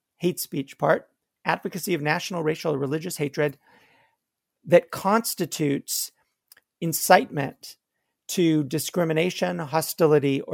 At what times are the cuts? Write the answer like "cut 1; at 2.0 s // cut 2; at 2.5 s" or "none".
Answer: none